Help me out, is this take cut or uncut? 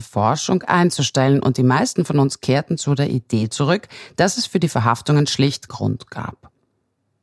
cut